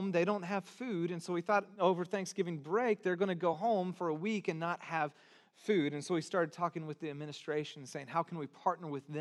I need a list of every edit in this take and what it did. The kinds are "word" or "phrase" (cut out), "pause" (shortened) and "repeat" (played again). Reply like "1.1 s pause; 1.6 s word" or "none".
none

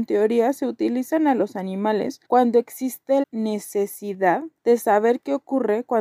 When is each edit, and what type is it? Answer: 2.2 s pause; 3.2 s word; 4.6 s pause

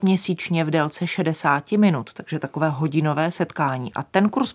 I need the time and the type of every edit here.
none

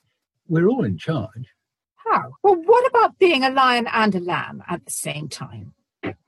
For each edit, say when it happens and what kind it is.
2.4 s pause

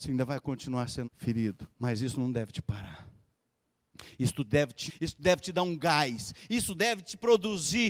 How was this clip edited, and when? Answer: 1.0 s word; 1.7 s pause; 4.9 s word

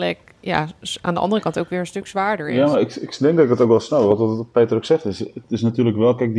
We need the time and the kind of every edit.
none

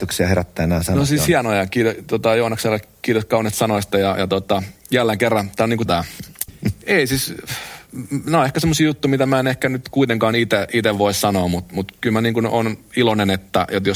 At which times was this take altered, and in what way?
5.9 s phrase; 6.5 s phrase

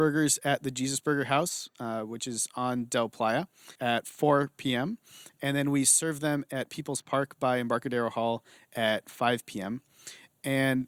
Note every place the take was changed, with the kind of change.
3.7 s pause

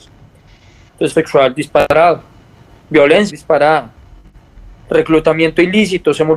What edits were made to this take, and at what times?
1.1 s word; 3.3 s word

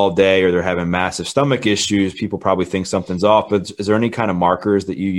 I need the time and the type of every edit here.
none

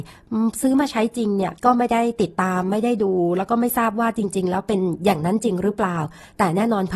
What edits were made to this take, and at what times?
1.6 s pause

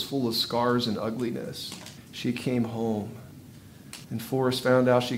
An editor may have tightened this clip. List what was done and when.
2.0 s pause; 4.0 s pause

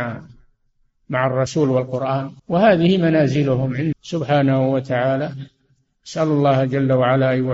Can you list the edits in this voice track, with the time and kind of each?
2.4 s pause; 3.9 s word

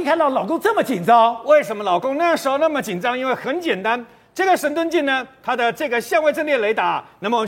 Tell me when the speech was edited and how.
none

